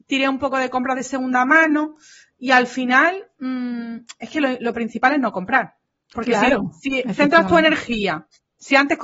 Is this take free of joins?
yes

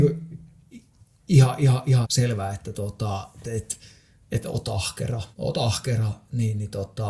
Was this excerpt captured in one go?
no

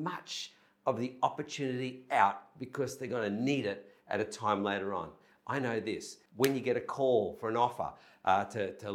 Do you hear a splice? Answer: yes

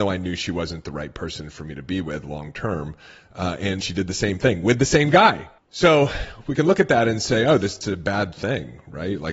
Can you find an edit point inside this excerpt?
yes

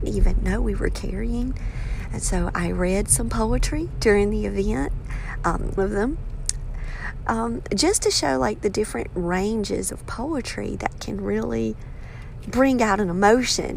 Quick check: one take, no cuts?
no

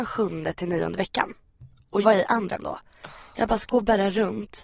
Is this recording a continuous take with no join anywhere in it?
no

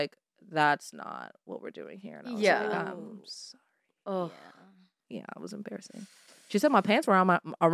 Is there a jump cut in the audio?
no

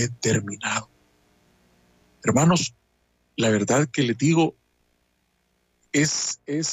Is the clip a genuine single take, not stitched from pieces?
yes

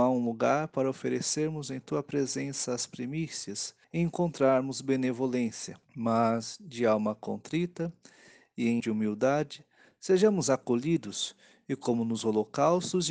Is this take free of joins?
no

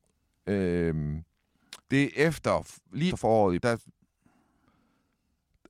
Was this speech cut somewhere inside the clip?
yes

